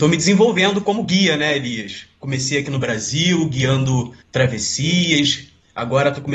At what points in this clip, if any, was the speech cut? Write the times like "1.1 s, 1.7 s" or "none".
4.2 s